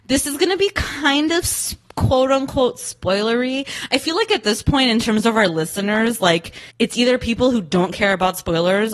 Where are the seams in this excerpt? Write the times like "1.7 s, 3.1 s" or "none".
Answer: 6.7 s